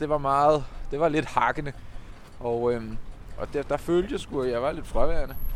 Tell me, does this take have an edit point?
yes; 1 cut; at 3.5 s

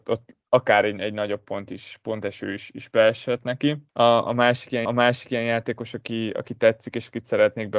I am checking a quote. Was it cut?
yes; 2 cuts; at 3.9 s, 4.9 s

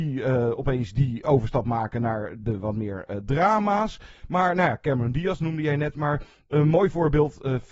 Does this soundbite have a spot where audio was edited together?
no; 0 cuts

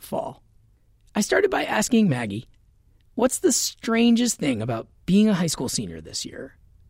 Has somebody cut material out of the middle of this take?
no; 0 cuts

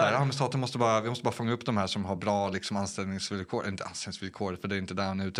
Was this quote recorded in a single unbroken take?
yes; 0 cuts

